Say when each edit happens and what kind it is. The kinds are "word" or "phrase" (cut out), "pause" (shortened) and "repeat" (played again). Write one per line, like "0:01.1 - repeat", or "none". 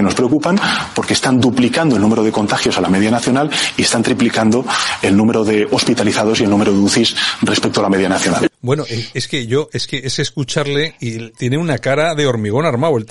0:08.5 - pause